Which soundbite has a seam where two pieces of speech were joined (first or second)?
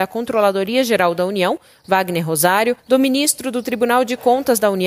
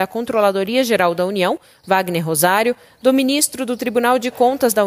first